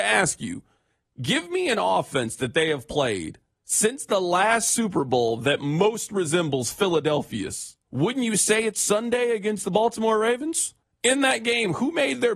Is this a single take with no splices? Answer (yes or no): no